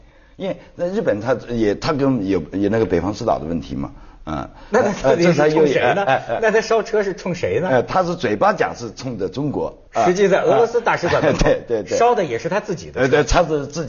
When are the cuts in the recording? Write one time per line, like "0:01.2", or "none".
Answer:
0:09.9